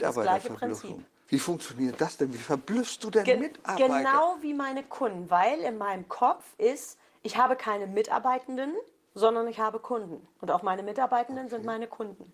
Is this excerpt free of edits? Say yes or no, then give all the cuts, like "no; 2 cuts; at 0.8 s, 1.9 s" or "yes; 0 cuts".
yes; 0 cuts